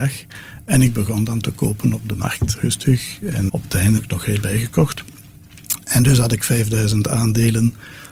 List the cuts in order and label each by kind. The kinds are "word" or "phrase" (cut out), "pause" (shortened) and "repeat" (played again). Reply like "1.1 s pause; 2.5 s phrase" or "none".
2.5 s word; 3.5 s word; 4.0 s word; 4.4 s word